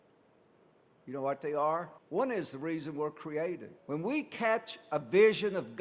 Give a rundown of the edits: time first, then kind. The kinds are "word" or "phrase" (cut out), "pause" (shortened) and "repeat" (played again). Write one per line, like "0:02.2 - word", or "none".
0:02.0 - pause
0:03.8 - pause